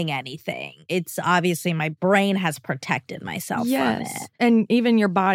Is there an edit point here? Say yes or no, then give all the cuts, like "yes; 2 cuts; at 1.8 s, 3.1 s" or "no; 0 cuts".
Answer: no; 0 cuts